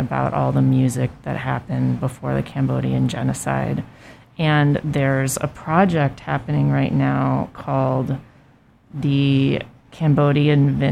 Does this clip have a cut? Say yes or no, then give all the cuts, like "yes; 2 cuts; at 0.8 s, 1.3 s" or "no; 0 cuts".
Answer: no; 0 cuts